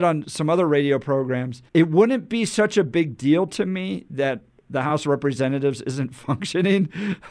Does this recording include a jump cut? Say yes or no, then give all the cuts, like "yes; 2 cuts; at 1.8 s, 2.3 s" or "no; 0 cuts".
yes; 1 cut; at 1.7 s